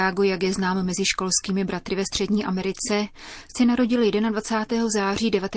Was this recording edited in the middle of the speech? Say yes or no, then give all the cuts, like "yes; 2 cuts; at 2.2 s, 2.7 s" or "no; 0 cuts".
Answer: no; 0 cuts